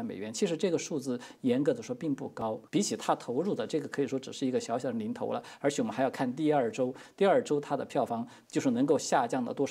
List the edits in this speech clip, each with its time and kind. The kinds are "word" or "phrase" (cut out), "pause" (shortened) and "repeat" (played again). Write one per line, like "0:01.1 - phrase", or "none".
0:02.7 - pause